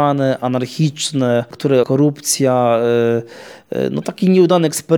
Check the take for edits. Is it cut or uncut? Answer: cut